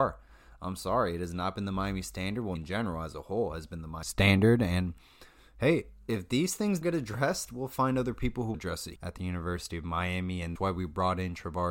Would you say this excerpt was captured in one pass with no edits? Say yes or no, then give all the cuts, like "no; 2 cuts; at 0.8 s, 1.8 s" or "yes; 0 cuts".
no; 5 cuts; at 2.6 s, 6.8 s, 8.5 s, 9.0 s, 10.6 s